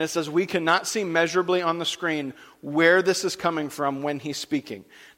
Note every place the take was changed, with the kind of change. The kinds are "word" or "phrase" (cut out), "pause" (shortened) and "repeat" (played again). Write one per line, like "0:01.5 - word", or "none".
none